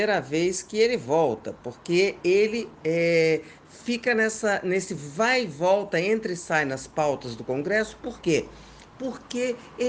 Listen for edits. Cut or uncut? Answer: uncut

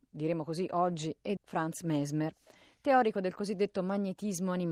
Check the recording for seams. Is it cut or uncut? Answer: cut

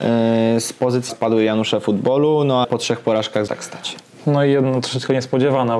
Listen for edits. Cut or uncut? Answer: cut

